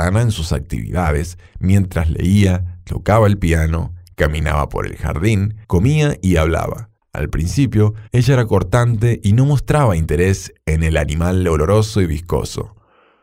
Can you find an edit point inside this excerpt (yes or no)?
yes